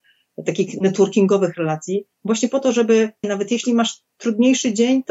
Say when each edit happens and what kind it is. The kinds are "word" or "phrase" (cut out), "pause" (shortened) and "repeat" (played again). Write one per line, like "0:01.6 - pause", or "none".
0:02.1 - pause
0:03.2 - word